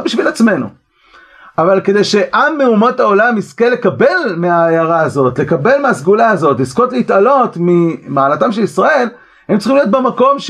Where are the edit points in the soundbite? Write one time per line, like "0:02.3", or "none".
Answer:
none